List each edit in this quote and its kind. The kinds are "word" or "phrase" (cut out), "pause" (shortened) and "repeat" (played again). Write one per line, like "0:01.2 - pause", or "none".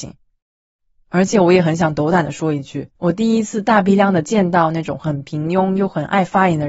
0:03.0 - pause